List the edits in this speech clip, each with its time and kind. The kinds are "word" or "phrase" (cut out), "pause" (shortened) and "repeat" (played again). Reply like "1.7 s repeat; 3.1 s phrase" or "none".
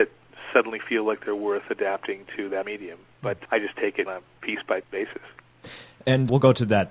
2.6 s word; 3.5 s word; 4.1 s word; 4.8 s word